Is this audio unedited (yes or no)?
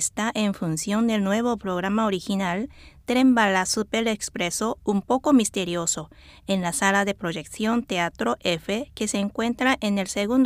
yes